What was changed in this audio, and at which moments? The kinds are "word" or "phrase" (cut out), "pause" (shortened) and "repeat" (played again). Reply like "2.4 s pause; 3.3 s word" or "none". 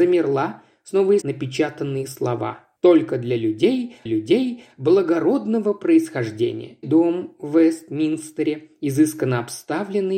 1.2 s phrase; 2.8 s pause; 4.1 s repeat; 6.8 s phrase